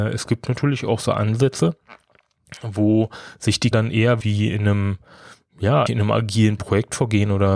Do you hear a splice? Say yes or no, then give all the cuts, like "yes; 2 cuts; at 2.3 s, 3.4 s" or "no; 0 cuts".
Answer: yes; 3 cuts; at 3.7 s, 4.2 s, 5.9 s